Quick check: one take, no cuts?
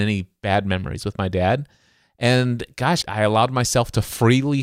no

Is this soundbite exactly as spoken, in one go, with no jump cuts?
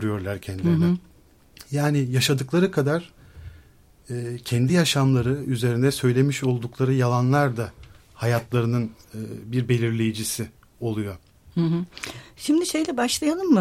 yes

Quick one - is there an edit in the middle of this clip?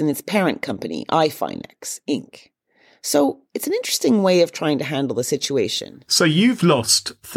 no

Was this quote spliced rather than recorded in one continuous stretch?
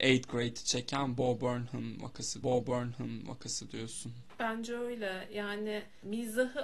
yes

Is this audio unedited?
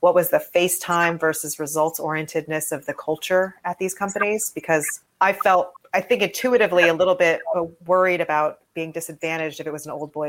yes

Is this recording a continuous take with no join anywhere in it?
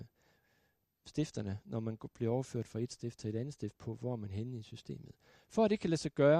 yes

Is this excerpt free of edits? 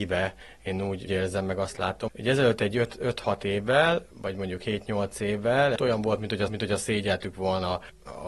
no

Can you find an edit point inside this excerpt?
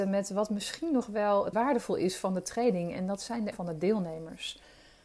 yes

